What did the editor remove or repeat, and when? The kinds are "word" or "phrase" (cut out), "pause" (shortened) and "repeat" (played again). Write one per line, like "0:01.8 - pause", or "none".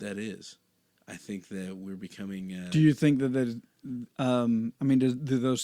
0:04.1 - pause